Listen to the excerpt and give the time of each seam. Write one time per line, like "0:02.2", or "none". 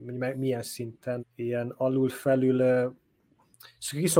0:01.2